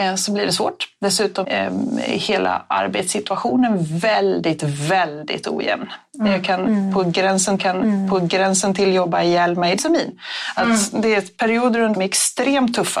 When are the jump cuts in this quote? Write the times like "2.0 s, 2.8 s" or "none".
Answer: 1.4 s, 7.6 s, 9.8 s, 11.9 s